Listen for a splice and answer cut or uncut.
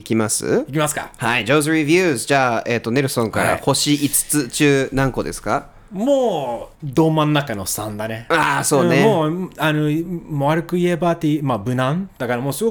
cut